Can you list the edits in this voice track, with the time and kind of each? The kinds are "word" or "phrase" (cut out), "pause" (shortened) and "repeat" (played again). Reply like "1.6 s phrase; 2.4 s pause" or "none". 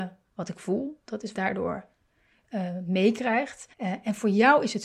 1.3 s phrase; 3.7 s pause